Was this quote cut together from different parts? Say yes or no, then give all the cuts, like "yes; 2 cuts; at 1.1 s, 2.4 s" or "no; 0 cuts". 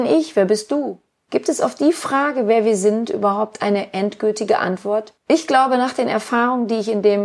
yes; 2 cuts; at 1.2 s, 5.2 s